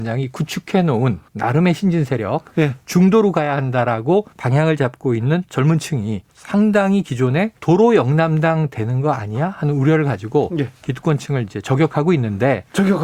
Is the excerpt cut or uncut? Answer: cut